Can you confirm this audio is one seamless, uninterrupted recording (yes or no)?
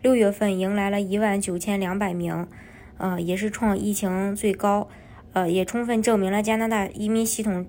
yes